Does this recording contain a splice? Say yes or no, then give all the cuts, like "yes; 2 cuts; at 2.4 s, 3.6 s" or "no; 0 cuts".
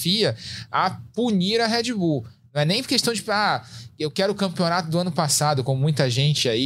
no; 0 cuts